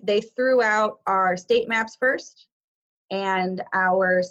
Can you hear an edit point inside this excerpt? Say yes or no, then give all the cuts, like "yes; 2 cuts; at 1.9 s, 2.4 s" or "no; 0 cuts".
no; 0 cuts